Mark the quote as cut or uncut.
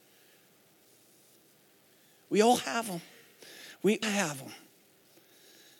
cut